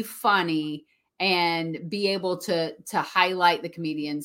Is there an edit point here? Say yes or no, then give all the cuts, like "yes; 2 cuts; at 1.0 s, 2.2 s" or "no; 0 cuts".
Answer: no; 0 cuts